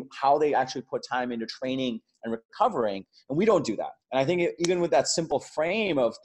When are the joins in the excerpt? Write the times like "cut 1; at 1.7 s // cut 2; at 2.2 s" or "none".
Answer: cut 1; at 4.0 s